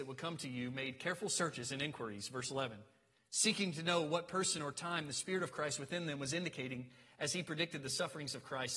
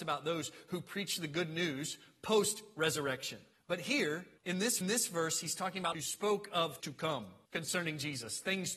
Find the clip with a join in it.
second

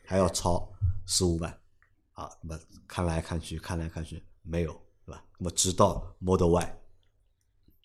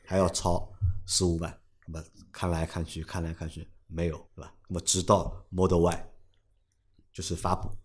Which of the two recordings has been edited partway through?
second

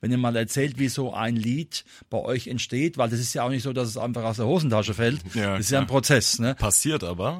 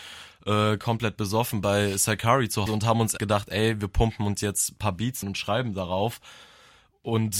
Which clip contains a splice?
second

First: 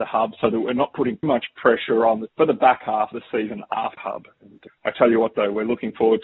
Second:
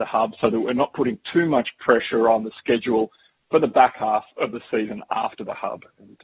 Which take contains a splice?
first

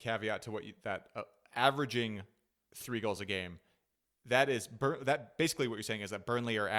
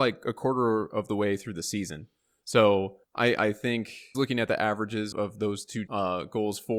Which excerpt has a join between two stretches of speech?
second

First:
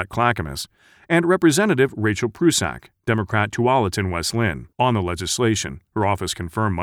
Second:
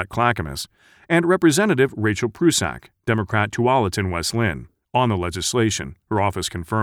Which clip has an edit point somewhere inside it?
first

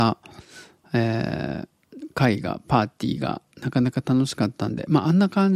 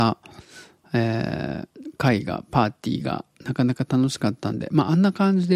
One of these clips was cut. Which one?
second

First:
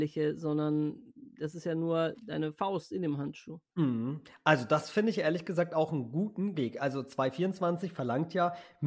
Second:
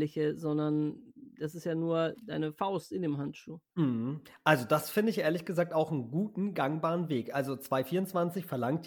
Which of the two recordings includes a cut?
first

